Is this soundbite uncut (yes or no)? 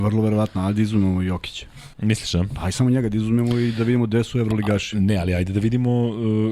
no